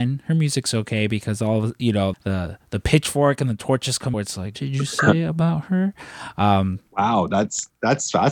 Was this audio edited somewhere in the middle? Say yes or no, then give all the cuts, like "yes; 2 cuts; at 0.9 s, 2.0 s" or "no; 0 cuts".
yes; 3 cuts; at 2.1 s, 4.1 s, 4.5 s